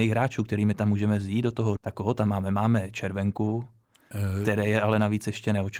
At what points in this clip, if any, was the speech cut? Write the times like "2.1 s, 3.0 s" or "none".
1.8 s